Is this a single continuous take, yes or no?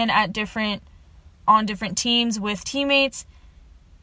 no